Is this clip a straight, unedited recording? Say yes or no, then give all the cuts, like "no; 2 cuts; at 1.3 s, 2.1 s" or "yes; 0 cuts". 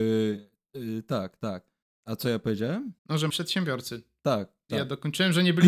no; 3 cuts; at 1.8 s, 3.0 s, 3.3 s